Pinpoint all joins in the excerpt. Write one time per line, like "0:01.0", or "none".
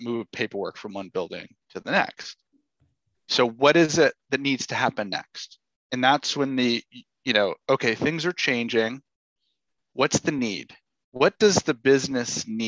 none